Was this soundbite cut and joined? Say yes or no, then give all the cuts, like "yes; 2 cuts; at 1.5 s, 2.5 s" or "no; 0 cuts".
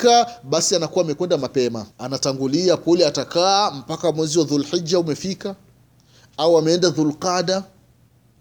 yes; 1 cut; at 1.9 s